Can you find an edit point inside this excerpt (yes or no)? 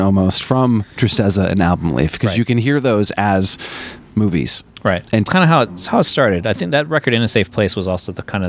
yes